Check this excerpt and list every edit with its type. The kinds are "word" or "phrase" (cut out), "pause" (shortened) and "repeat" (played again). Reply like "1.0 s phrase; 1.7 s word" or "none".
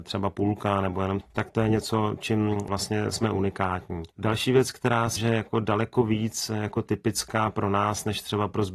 1.2 s word; 4.1 s pause; 5.2 s word